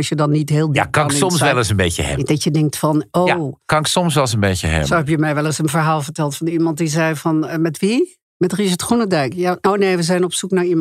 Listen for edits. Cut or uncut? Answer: uncut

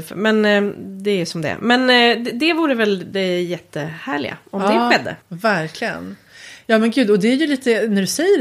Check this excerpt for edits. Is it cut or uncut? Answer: cut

